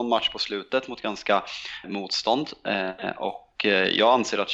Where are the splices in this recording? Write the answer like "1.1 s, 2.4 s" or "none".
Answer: 1.8 s